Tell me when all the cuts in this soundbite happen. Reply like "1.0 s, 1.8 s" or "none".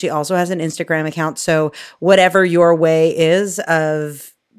none